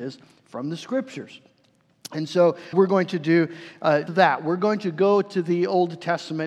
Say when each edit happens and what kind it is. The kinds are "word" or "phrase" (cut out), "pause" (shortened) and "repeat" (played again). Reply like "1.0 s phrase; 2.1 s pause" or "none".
2.7 s word; 4.1 s word